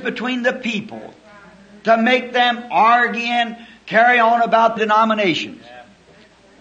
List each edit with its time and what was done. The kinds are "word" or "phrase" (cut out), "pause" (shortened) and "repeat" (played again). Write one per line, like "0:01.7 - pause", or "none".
0:04.8 - word